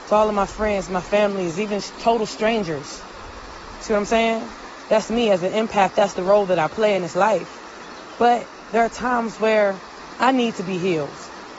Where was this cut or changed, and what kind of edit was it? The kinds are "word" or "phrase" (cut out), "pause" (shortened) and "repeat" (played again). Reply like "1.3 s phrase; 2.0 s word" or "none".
none